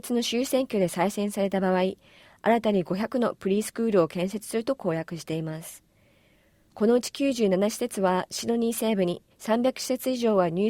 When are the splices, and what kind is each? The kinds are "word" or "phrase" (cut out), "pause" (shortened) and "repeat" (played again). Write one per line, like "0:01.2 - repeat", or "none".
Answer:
0:09.3 - pause